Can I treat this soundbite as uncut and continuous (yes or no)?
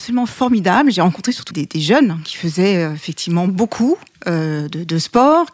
no